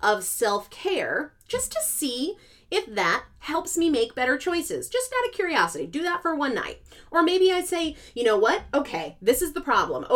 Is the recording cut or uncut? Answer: uncut